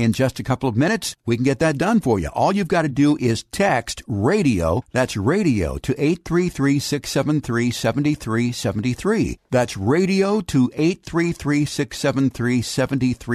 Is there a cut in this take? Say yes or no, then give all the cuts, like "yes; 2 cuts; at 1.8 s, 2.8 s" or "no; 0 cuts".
no; 0 cuts